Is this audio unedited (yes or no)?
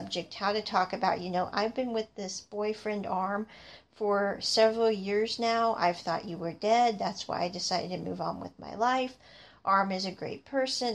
yes